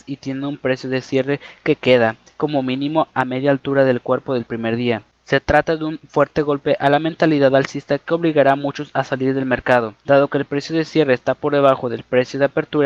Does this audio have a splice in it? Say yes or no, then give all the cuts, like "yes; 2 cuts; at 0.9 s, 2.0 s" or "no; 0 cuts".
yes; 1 cut; at 10.0 s